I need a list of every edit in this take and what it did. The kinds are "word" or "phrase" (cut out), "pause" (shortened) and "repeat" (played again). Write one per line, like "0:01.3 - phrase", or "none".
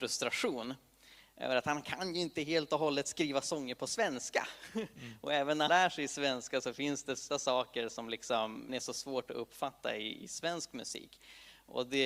0:05.7 - word
0:07.3 - word
0:08.7 - word